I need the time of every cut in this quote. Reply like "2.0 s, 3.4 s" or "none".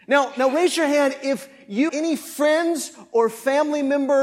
1.9 s